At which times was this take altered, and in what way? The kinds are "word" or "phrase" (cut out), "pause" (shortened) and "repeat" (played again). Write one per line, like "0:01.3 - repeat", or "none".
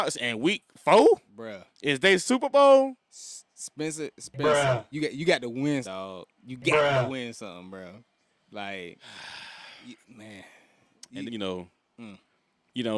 0:01.7 - pause
0:04.9 - phrase
0:05.8 - word
0:06.4 - pause
0:08.4 - pause
0:10.0 - pause
0:11.3 - word